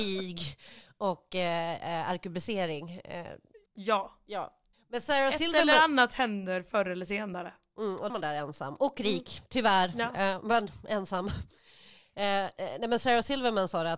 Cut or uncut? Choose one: cut